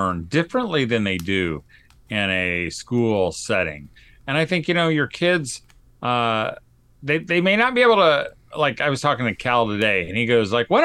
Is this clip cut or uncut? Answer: uncut